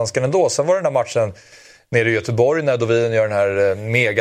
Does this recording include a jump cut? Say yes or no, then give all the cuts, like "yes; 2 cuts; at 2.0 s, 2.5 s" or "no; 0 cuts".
no; 0 cuts